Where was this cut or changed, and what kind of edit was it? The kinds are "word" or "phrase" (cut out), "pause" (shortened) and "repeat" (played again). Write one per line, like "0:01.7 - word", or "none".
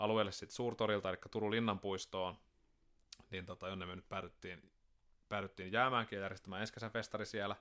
none

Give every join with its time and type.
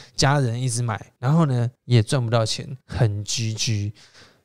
0:01.2 - pause
0:01.7 - pause
0:02.8 - pause

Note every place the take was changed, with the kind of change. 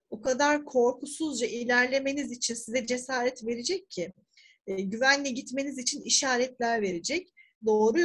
none

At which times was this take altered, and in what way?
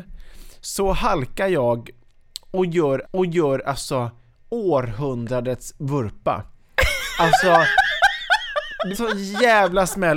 0:03.0 - repeat
0:08.9 - word

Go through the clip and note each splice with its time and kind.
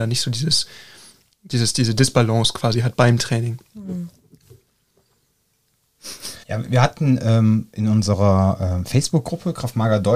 0:06.4 - pause

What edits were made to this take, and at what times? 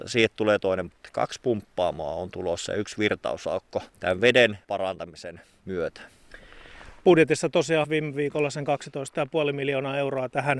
0:00.9 - word
0:03.9 - pause
0:04.6 - phrase
0:07.8 - word

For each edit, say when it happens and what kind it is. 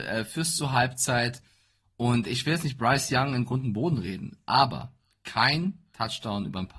none

